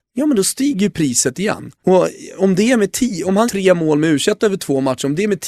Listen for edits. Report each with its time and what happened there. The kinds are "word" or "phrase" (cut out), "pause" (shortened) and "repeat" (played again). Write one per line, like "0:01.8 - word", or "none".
0:03.5 - word